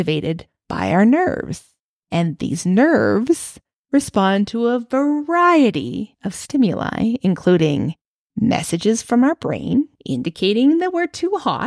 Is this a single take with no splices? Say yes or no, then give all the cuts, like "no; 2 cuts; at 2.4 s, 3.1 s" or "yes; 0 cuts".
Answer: yes; 0 cuts